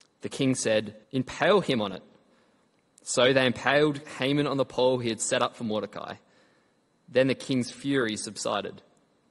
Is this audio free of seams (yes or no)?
no